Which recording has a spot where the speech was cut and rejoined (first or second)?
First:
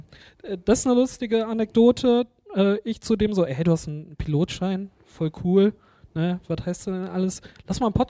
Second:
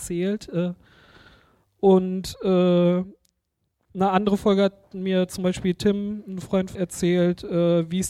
second